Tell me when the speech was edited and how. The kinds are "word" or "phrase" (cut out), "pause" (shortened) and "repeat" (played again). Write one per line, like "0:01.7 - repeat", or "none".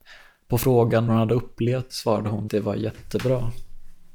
0:01.1 - word
0:01.9 - word
0:02.5 - word